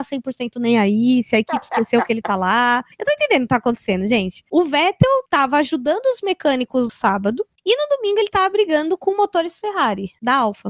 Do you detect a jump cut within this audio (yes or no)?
yes